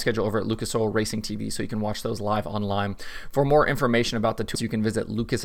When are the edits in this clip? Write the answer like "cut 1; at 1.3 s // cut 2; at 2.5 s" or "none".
cut 1; at 4.5 s